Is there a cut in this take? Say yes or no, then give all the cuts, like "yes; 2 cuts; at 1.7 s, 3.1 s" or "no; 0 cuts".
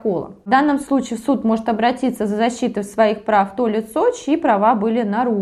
no; 0 cuts